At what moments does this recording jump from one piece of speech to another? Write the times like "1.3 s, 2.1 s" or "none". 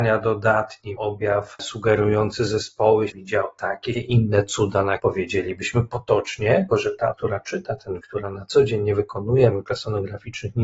1.0 s, 3.1 s, 3.9 s, 5.0 s, 6.7 s, 7.1 s, 8.0 s, 9.5 s

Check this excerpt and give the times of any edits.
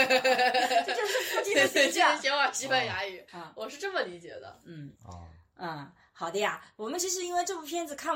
3.3 s, 5.0 s

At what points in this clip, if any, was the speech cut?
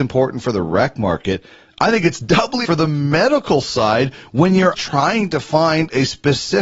2.6 s, 4.7 s

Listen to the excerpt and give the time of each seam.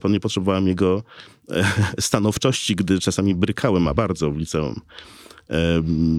4.0 s

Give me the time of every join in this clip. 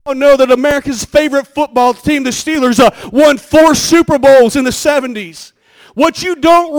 none

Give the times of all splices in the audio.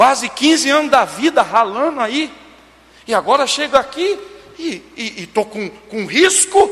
none

